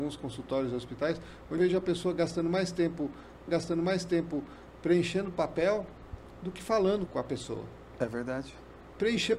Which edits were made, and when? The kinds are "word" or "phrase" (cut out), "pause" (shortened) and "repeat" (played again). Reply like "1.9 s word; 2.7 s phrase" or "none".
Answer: 1.6 s word; 3.5 s repeat; 7.1 s word